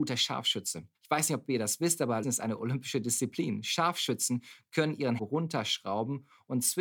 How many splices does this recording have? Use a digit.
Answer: 3